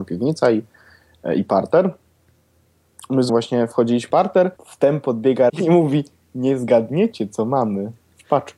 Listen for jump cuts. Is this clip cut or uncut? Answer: cut